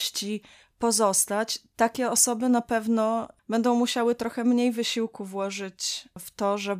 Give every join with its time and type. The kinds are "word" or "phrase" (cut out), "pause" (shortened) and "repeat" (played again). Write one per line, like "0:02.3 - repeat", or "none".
none